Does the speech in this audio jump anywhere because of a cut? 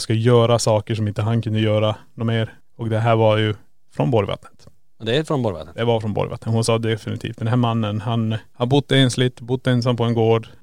no; 0 cuts

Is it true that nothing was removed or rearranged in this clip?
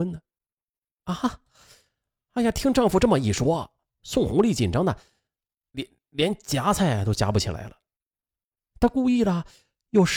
yes; 0 cuts

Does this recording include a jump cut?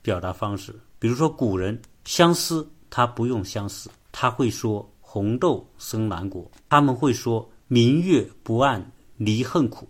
no; 0 cuts

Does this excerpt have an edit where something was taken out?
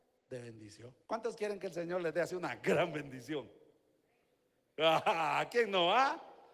yes; 1 cut; at 1.1 s

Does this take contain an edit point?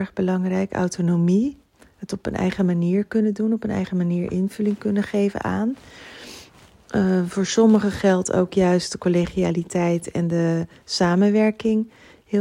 no; 0 cuts

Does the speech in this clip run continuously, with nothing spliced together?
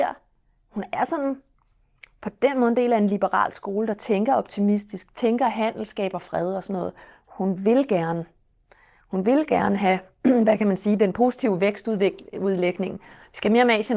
yes; 0 cuts

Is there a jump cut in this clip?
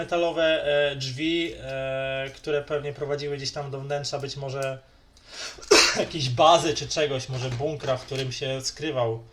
no; 0 cuts

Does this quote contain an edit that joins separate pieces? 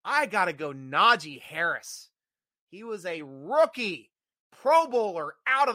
no; 0 cuts

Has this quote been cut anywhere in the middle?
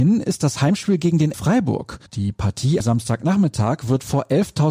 yes; 3 cuts; at 1.3 s, 2.1 s, 2.8 s

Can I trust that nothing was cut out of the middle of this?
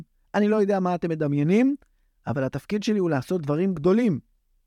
yes; 0 cuts

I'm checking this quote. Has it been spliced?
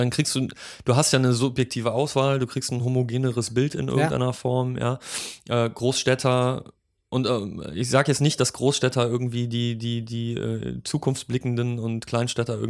no; 0 cuts

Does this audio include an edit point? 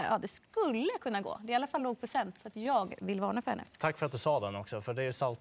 no; 0 cuts

